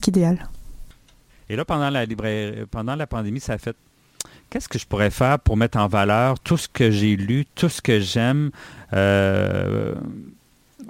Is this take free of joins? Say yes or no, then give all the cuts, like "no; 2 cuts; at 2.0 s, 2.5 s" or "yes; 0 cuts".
yes; 0 cuts